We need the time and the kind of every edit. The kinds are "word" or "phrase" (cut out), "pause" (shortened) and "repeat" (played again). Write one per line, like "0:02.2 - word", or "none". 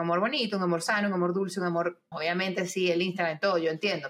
0:02.1 - word